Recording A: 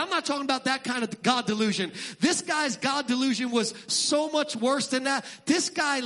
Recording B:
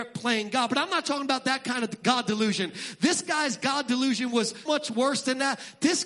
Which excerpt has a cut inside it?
B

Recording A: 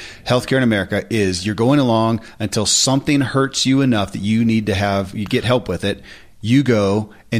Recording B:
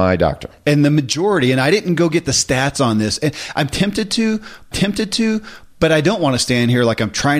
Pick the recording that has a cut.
B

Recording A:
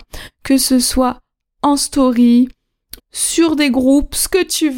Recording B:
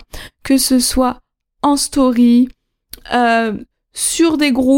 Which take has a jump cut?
A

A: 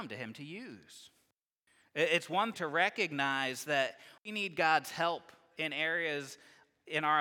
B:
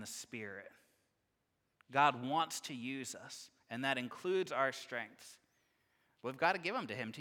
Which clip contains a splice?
A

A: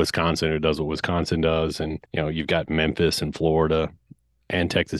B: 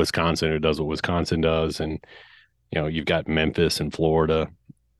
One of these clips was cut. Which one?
A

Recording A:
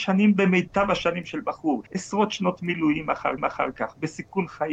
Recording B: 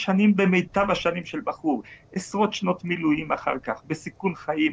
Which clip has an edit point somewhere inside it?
A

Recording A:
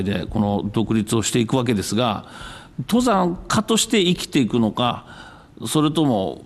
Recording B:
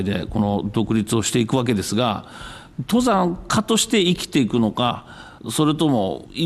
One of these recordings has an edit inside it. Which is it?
B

